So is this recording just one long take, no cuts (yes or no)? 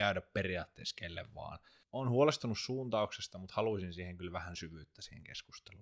yes